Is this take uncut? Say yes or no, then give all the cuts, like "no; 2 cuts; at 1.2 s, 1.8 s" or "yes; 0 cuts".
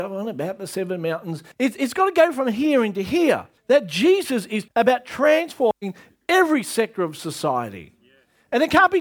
no; 3 cuts; at 1.5 s, 3.6 s, 4.7 s